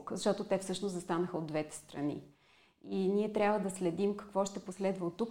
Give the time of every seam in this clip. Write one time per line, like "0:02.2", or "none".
none